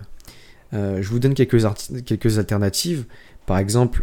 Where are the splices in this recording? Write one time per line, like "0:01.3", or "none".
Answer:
none